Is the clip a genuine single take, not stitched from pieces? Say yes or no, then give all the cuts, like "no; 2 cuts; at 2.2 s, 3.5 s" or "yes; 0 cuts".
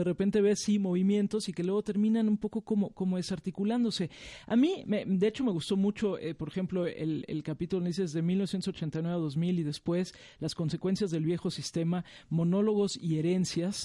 yes; 0 cuts